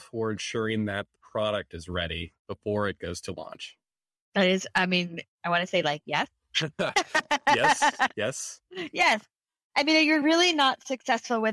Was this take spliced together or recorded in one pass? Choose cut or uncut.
uncut